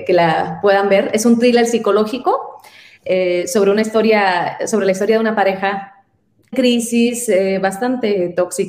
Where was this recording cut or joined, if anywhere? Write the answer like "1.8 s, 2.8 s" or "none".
6.5 s